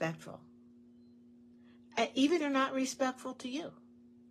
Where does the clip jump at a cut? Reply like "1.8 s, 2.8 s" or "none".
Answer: 2.4 s

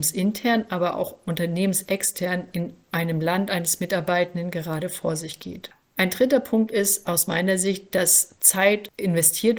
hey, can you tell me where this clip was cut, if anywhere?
none

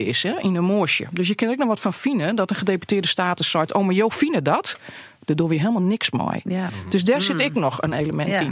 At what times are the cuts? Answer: none

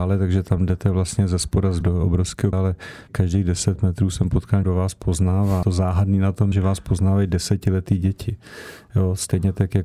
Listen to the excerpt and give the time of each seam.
1.8 s, 2.5 s, 3.1 s, 4.6 s, 5.6 s, 6.5 s

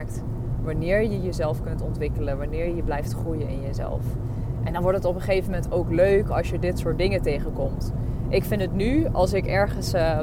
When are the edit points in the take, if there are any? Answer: none

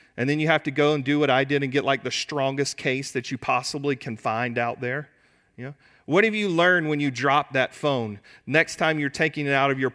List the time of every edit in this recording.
none

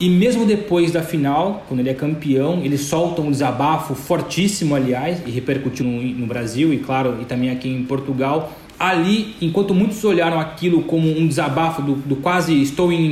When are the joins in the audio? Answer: 5.8 s

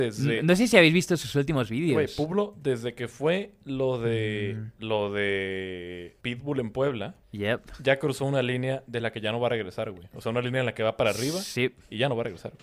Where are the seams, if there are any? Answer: 6.2 s, 7.2 s

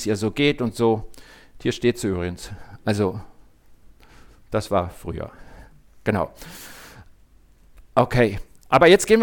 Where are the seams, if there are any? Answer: none

